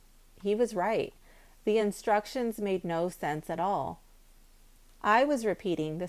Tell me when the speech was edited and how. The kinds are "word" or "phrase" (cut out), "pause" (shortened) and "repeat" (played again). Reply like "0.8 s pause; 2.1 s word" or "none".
none